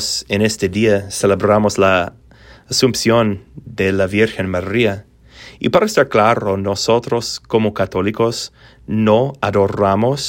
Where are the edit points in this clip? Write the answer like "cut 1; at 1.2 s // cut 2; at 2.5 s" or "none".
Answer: none

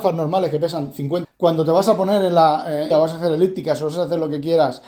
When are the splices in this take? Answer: cut 1; at 1.2 s // cut 2; at 2.9 s

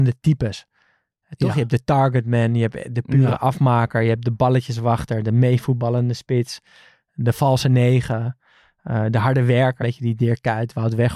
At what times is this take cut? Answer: cut 1; at 9.8 s

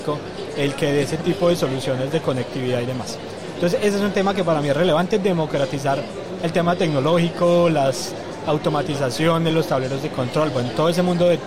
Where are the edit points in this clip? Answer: none

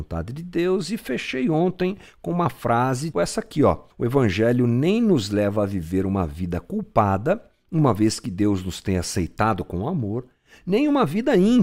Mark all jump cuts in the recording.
cut 1; at 3.1 s // cut 2; at 3.9 s

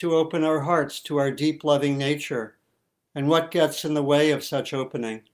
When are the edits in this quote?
none

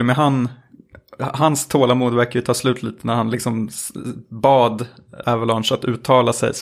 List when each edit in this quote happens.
cut 1; at 5.2 s

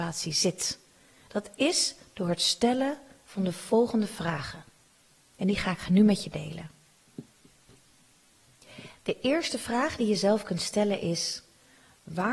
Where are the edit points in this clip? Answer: none

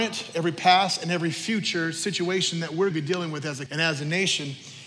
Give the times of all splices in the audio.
cut 1; at 2.9 s // cut 2; at 3.7 s

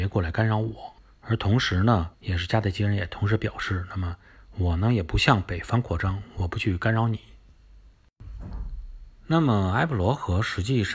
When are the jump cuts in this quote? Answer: cut 1; at 1.0 s // cut 2; at 2.1 s

